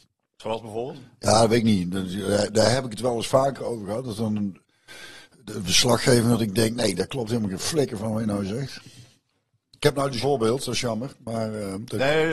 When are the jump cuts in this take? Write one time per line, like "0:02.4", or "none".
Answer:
0:10.2